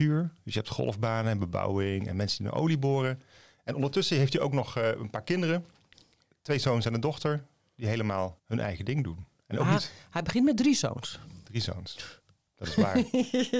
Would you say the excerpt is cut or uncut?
uncut